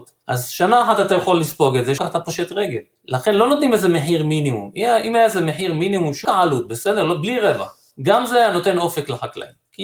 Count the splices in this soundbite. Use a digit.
2